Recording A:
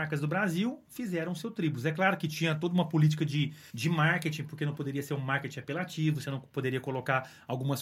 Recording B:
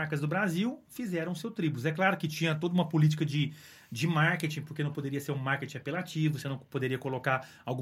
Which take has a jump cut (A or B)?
A